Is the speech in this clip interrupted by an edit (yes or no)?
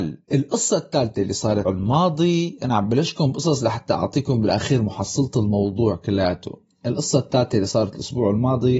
yes